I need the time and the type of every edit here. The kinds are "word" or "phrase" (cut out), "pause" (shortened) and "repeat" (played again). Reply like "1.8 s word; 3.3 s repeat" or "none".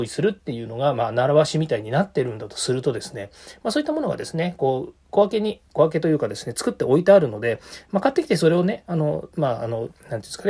9.3 s pause